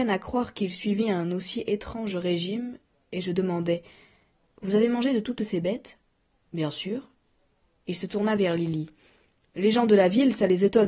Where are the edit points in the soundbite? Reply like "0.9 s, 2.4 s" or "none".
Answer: none